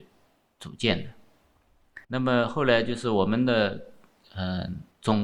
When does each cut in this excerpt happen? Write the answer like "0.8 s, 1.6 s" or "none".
2.0 s